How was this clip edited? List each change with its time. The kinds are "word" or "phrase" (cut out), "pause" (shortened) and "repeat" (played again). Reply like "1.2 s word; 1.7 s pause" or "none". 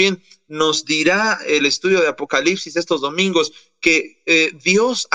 none